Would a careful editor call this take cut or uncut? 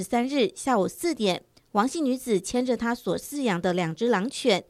uncut